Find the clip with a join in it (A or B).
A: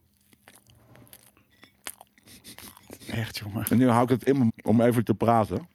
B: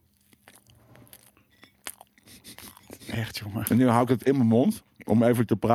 A